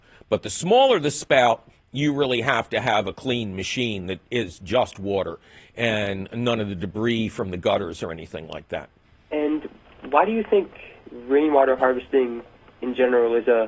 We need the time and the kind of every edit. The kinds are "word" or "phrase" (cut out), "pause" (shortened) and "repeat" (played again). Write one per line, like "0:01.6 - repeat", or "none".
none